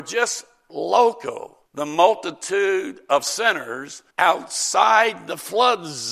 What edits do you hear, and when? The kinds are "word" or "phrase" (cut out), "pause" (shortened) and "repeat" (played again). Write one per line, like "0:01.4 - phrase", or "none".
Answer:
0:01.7 - pause
0:04.1 - pause